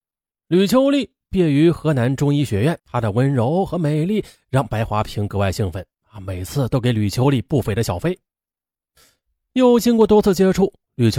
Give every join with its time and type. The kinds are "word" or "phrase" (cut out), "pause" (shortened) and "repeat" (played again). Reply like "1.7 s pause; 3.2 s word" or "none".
2.8 s pause